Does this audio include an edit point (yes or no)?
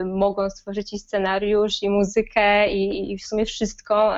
no